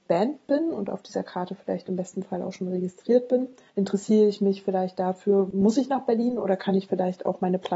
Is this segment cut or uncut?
uncut